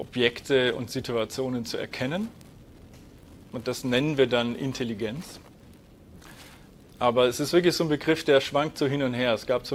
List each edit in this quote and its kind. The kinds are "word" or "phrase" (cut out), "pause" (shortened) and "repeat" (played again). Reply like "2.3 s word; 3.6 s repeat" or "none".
none